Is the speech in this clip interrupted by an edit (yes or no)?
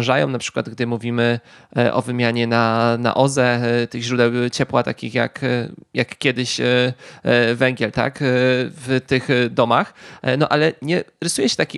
no